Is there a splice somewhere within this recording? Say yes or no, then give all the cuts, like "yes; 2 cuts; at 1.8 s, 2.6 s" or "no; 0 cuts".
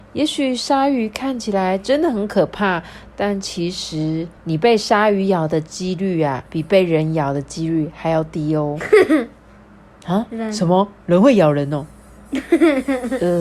yes; 3 cuts; at 4.4 s, 6.5 s, 11.0 s